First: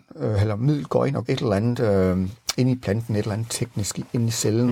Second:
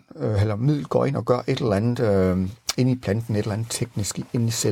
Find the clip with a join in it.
first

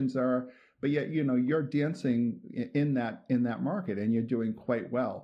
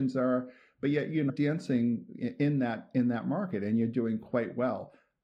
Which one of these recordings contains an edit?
second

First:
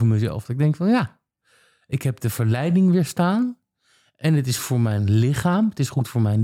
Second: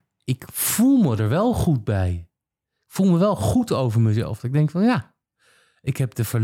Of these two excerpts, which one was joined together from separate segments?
first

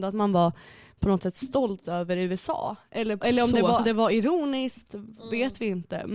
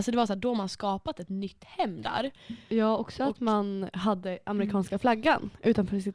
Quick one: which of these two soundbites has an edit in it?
first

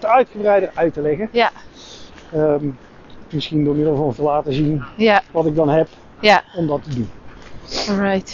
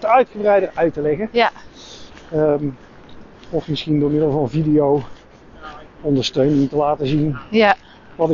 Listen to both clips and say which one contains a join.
first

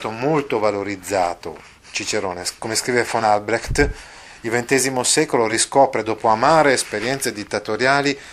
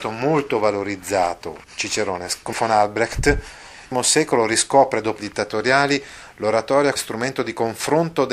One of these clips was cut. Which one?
second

